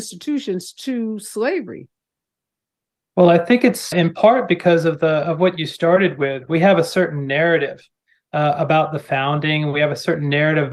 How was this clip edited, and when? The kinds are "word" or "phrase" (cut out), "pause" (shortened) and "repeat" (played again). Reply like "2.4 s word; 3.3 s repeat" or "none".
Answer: 3.9 s word